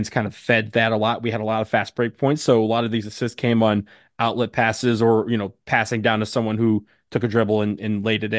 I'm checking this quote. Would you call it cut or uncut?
uncut